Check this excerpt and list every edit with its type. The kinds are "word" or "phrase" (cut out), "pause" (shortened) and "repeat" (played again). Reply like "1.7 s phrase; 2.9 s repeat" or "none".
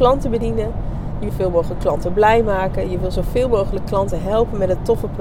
1.3 s word